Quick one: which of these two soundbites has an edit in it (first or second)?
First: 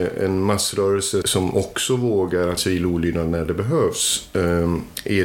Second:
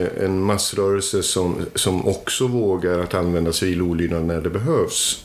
first